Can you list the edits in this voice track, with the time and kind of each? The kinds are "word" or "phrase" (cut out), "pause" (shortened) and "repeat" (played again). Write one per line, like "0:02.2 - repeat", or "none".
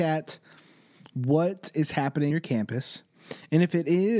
0:02.3 - word

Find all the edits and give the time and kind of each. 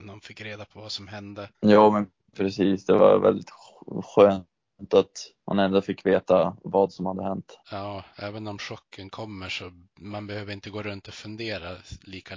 0:01.5 - pause
0:05.4 - pause
0:07.6 - pause

